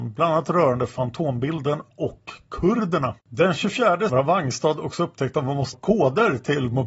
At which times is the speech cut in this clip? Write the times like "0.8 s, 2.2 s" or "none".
3.2 s, 4.1 s, 5.7 s